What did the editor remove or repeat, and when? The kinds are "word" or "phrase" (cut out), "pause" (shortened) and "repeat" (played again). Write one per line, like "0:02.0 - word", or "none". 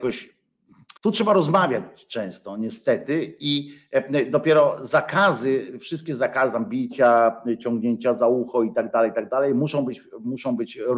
0:01.0 - pause